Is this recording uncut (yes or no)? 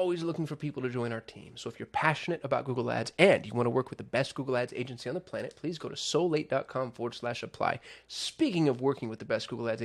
yes